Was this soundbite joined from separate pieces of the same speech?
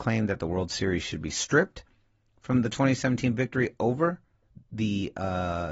no; 0 cuts

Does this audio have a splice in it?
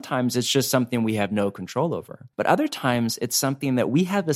yes; 1 cut; at 2.3 s

